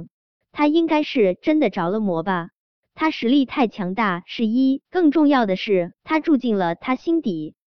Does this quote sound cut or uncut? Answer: cut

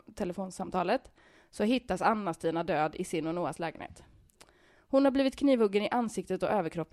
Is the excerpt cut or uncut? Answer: uncut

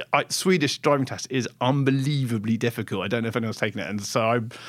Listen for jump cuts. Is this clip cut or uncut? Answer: uncut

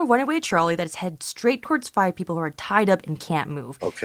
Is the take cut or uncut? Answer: uncut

